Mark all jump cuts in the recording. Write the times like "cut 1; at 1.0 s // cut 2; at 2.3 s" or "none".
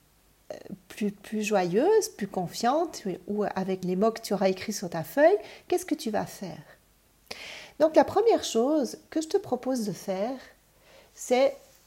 cut 1; at 3.8 s